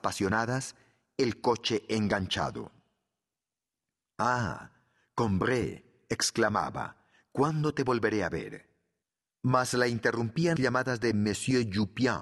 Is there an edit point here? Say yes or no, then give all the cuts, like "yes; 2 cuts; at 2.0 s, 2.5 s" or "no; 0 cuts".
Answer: yes; 1 cut; at 10.6 s